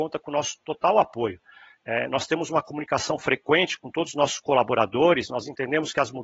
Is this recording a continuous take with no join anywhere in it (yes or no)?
yes